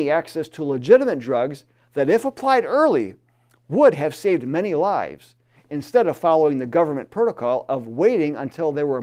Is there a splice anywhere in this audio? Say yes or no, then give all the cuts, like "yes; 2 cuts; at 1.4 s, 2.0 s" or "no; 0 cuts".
no; 0 cuts